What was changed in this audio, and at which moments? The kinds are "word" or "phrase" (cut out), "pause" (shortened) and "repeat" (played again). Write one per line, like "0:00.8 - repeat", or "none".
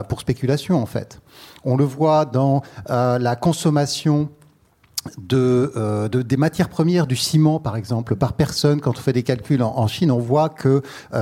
none